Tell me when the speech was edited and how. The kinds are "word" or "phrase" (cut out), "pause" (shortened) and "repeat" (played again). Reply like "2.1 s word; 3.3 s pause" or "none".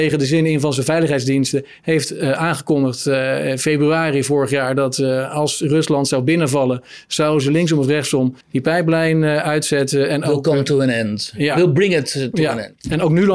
8.4 s pause